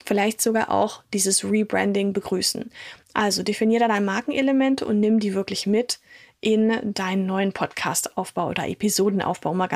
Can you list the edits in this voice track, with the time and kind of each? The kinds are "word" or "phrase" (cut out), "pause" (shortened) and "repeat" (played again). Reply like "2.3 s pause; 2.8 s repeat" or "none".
none